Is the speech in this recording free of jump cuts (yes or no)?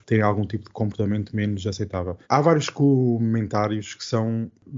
no